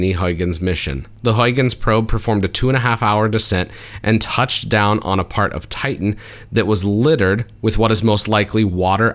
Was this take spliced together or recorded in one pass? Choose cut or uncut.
cut